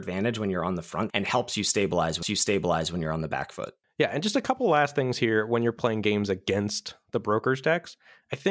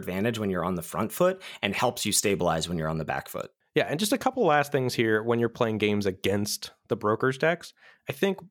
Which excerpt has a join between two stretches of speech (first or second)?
first